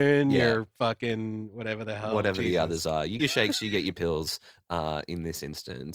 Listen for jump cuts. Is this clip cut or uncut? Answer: cut